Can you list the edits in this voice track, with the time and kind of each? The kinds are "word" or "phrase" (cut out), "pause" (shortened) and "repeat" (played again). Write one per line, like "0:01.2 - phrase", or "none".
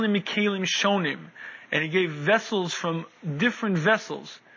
none